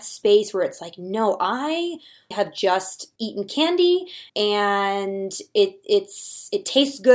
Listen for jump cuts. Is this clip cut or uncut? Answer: cut